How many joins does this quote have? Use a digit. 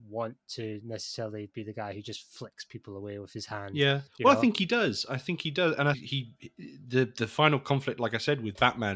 2